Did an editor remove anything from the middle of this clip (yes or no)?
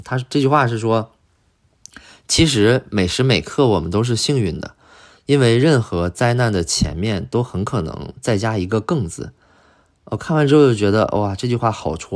no